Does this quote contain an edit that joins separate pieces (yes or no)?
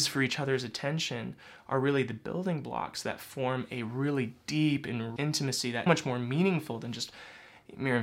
yes